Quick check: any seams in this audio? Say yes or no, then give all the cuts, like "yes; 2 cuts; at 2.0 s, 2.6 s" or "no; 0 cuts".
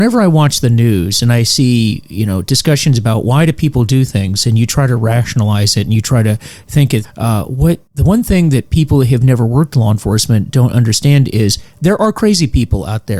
yes; 2 cuts; at 7.0 s, 7.9 s